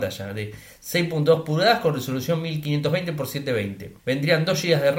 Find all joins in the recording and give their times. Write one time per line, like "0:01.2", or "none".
0:04.0